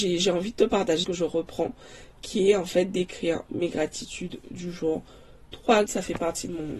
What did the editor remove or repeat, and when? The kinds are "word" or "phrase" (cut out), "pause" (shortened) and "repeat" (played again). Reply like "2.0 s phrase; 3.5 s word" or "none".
1.0 s phrase; 5.9 s word